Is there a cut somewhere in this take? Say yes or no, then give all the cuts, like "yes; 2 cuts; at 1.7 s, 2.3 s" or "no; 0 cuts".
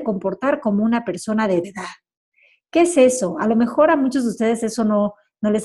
yes; 1 cut; at 1.6 s